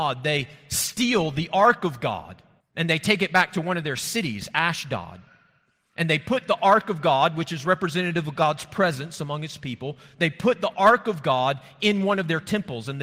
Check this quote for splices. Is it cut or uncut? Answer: cut